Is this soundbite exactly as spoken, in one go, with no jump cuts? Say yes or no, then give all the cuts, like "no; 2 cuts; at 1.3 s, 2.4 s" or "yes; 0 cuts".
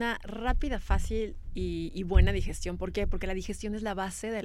yes; 0 cuts